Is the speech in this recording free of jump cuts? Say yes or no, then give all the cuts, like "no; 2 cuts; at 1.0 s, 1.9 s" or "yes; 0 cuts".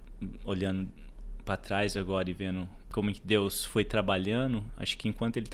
yes; 0 cuts